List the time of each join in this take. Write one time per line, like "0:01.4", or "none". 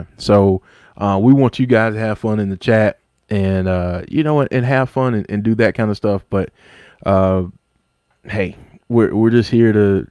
none